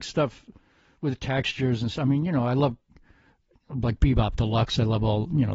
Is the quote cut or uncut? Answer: uncut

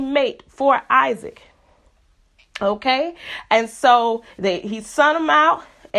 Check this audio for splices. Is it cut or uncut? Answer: uncut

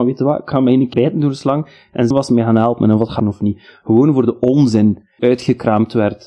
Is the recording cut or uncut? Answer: cut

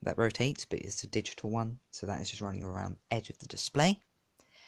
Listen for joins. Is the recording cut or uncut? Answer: cut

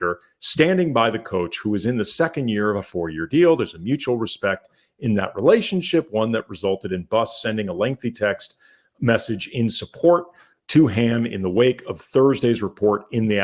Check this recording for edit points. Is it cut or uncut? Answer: uncut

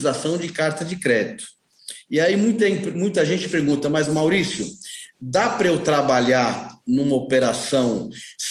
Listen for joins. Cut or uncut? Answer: uncut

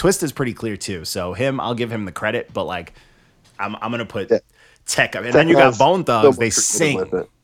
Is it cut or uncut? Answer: uncut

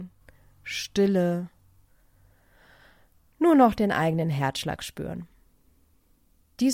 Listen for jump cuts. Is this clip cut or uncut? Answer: uncut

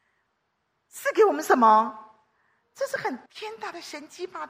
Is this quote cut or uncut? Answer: cut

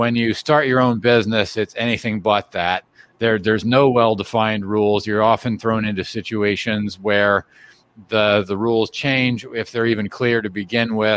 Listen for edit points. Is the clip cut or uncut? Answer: uncut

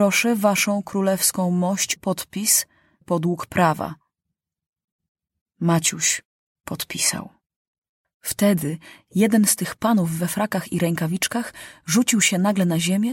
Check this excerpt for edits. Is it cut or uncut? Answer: cut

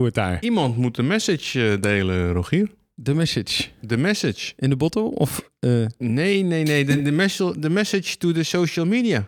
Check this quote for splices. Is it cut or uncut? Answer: uncut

